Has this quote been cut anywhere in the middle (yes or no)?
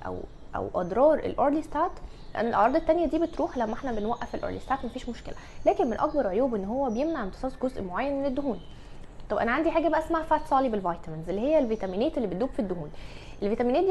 no